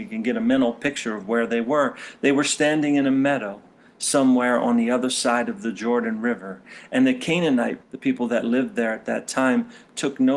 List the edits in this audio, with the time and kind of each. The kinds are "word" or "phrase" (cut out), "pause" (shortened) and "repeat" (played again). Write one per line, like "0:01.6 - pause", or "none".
0:07.8 - word